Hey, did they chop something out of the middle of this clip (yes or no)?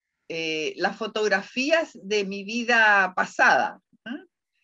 no